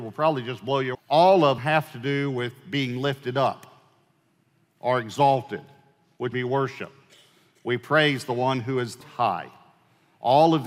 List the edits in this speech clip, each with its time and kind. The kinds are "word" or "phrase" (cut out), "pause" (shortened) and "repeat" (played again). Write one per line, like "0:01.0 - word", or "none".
0:00.9 - word
0:01.6 - word
0:06.3 - word
0:09.0 - word

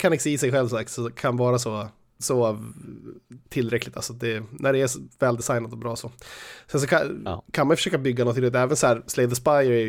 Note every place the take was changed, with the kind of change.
0:02.2 - word

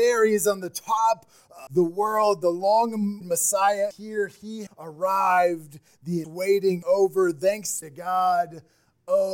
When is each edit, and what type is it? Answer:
0:01.7 - word
0:03.2 - word
0:03.9 - word
0:04.7 - word
0:06.2 - word
0:06.8 - word
0:07.8 - word

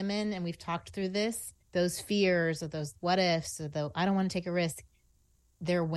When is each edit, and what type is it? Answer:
0:01.6 - pause

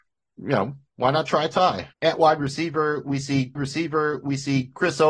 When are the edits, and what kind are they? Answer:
0:01.9 - pause
0:03.6 - repeat

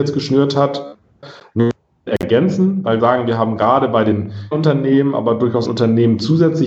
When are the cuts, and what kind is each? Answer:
0:02.1 - word
0:03.0 - word
0:04.5 - word
0:05.7 - phrase

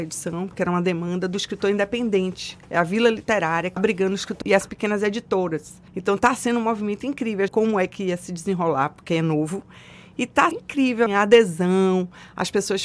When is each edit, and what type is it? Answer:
0:03.8 - word
0:04.4 - word
0:05.9 - pause
0:07.5 - phrase
0:10.5 - word
0:11.1 - word

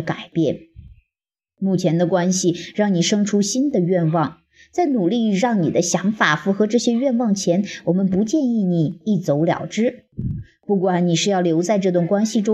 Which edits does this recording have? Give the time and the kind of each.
none

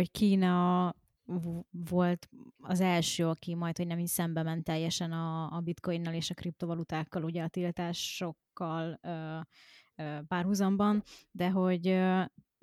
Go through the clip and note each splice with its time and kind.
none

